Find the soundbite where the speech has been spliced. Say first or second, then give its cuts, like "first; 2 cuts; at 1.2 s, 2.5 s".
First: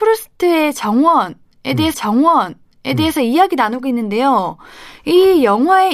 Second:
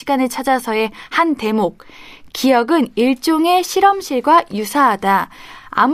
first; 1 cut; at 1.9 s